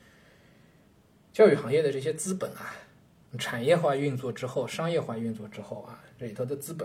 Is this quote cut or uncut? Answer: uncut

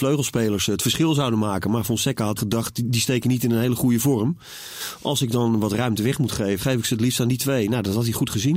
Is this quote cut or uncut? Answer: cut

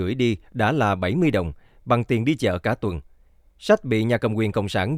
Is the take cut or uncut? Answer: uncut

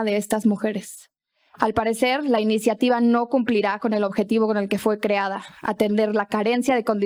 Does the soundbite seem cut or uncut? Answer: uncut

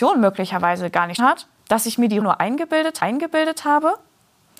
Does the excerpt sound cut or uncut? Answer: cut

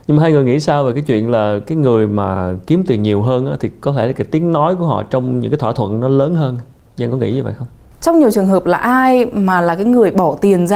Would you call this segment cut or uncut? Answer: uncut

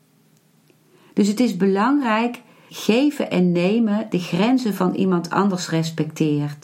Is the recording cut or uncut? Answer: cut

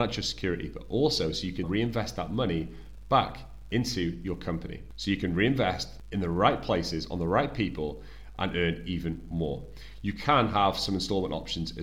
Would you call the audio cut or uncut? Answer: cut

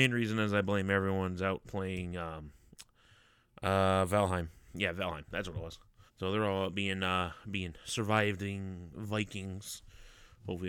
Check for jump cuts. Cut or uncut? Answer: cut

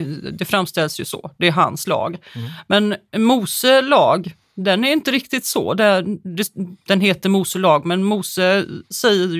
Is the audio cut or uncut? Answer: cut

